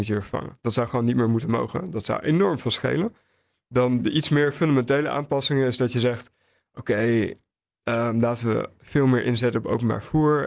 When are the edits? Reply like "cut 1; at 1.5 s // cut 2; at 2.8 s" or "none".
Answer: none

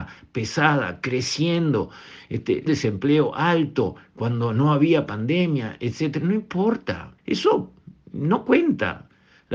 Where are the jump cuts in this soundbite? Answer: cut 1; at 2.7 s // cut 2; at 7.2 s

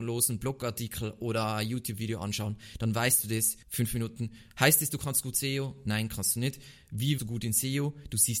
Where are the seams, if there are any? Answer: cut 1; at 3.6 s // cut 2; at 7.2 s

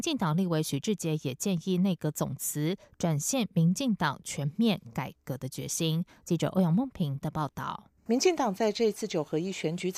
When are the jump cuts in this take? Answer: cut 1; at 8.0 s

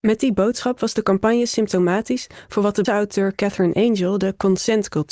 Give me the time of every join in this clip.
cut 1; at 2.8 s

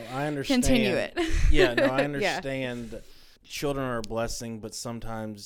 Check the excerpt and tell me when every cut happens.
cut 1; at 3.4 s

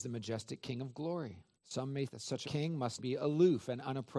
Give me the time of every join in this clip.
cut 1; at 1.5 s // cut 2; at 2.1 s // cut 3; at 2.4 s // cut 4; at 3.0 s

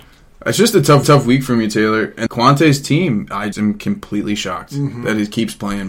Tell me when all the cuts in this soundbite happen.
cut 1; at 1.0 s // cut 2; at 2.3 s // cut 3; at 3.5 s

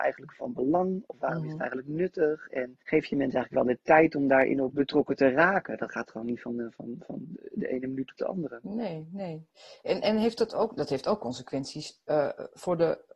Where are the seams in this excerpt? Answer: cut 1; at 2.8 s

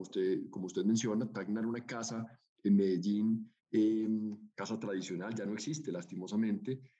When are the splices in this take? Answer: cut 1; at 3.6 s

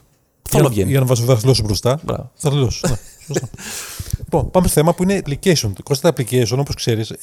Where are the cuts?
cut 1; at 2.4 s // cut 2; at 4.7 s // cut 3; at 5.2 s

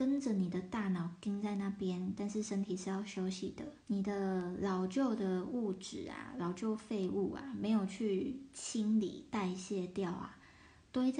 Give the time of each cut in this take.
cut 1; at 3.8 s

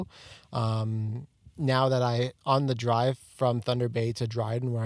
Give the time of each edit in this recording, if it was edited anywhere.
cut 1; at 2.4 s

